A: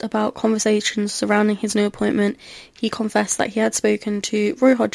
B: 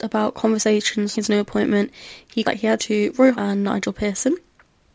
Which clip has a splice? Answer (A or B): B